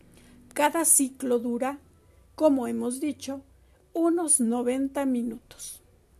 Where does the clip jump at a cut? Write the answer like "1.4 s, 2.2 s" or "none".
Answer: none